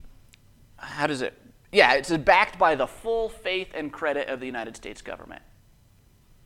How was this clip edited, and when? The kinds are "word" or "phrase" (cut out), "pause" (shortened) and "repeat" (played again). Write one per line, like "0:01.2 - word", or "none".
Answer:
none